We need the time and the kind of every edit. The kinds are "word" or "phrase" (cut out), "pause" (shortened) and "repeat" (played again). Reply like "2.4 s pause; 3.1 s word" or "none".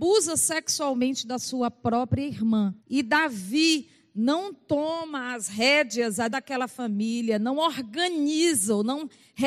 2.8 s pause; 6.3 s word